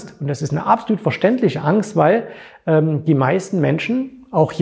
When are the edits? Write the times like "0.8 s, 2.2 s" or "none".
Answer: none